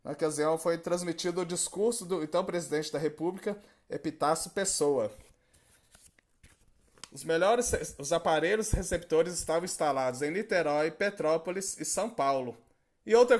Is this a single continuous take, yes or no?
yes